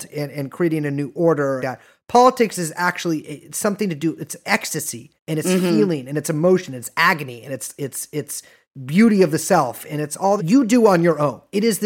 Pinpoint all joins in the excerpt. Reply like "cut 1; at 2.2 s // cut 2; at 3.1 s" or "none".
cut 1; at 1.6 s // cut 2; at 5.2 s // cut 3; at 7.8 s // cut 4; at 10.4 s